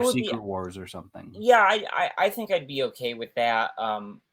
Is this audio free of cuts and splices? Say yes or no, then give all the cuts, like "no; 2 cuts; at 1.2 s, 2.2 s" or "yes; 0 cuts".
yes; 0 cuts